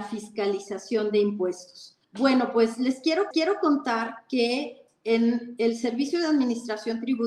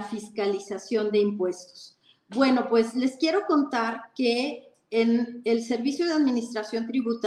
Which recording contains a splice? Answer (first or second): first